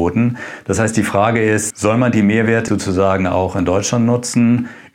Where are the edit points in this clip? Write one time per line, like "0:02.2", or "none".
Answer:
0:01.7
0:02.7